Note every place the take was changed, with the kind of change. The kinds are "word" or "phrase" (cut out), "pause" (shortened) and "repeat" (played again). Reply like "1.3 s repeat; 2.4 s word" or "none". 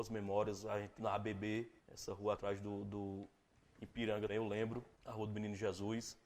1.0 s phrase; 1.8 s pause; 2.4 s phrase; 4.3 s word; 4.9 s pause